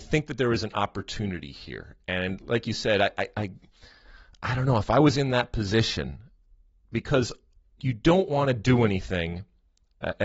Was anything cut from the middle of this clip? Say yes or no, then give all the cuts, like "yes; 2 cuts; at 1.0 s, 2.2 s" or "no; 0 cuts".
no; 0 cuts